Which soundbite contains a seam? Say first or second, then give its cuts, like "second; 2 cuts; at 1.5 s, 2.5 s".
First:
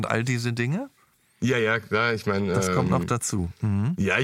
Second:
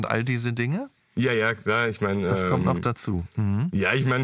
second; 1 cut; at 1.0 s